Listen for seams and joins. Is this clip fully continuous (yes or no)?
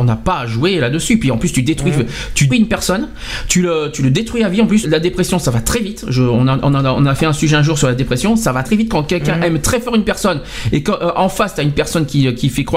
no